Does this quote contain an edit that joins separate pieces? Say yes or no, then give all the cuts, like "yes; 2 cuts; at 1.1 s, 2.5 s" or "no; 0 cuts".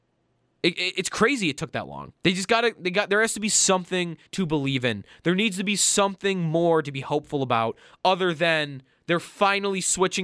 yes; 2 cuts; at 2.2 s, 4.3 s